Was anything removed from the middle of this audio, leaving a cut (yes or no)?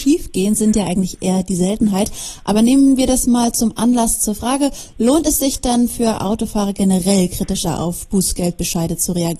no